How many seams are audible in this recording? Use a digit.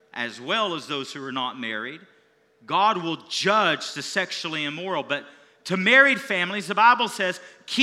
0